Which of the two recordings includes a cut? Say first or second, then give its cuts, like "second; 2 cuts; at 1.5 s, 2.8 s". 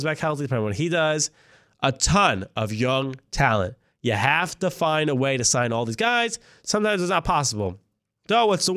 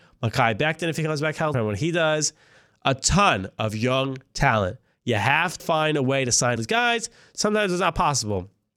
second; 3 cuts; at 1.5 s, 5.6 s, 6.6 s